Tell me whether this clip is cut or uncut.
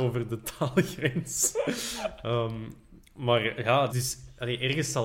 cut